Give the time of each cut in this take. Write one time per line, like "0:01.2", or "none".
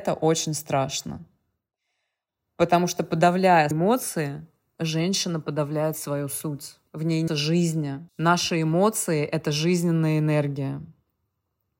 0:03.7
0:06.9
0:07.3
0:08.1